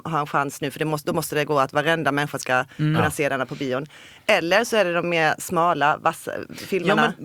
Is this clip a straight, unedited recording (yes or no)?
yes